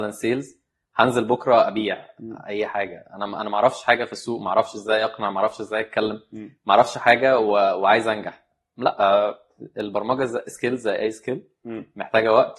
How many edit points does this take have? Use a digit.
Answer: 0